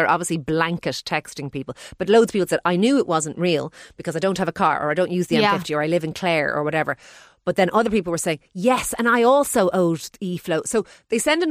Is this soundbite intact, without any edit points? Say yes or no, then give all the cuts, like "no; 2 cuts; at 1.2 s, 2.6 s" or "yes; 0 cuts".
yes; 0 cuts